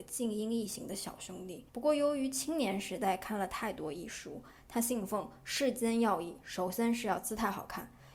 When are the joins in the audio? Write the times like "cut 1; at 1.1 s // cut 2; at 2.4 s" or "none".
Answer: cut 1; at 1.7 s